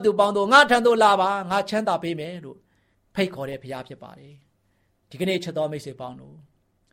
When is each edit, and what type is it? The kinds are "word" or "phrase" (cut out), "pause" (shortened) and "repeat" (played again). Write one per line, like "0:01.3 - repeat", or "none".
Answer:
none